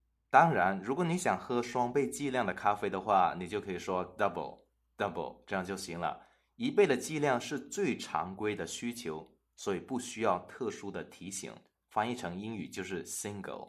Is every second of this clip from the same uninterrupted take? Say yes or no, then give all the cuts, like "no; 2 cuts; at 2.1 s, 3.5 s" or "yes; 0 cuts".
no; 1 cut; at 11.6 s